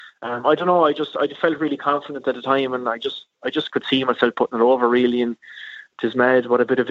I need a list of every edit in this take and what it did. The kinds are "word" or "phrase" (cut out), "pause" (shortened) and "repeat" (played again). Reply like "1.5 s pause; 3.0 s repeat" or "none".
none